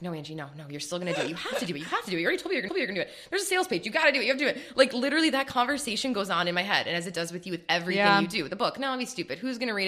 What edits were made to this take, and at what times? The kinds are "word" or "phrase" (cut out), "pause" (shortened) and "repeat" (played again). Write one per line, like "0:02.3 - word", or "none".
0:02.7 - repeat

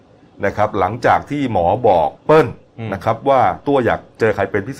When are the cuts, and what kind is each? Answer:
0:02.2 - pause

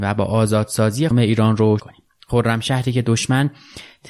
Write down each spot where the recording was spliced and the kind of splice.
0:01.1 - phrase
0:01.8 - word

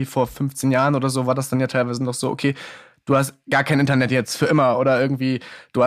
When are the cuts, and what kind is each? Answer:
none

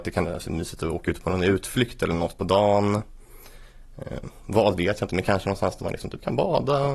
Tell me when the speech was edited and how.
none

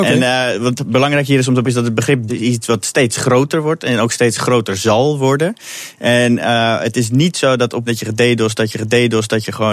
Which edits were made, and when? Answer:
0:01.6 - word
0:02.3 - word
0:07.9 - word
0:08.7 - repeat

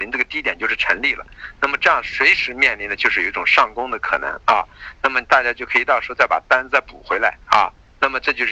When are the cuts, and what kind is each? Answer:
0:07.4 - pause

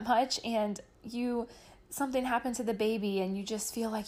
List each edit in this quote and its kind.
none

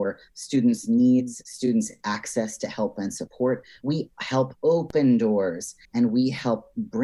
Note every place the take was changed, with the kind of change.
0:05.8 - pause

